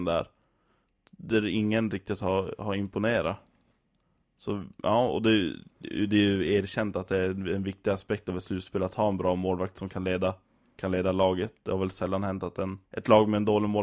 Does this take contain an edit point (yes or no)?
yes